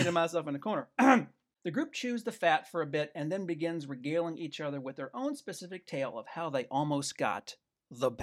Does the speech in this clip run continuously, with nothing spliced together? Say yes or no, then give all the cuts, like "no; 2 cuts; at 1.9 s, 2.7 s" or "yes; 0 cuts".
yes; 0 cuts